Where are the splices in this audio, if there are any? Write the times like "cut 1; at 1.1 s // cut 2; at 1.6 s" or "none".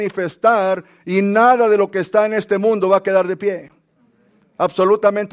none